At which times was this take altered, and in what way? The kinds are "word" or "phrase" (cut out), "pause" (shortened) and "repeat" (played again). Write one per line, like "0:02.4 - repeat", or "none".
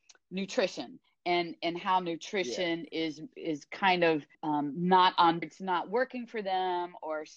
0:04.3 - pause
0:05.4 - phrase